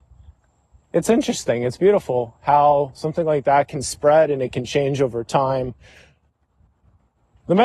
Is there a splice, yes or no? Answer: no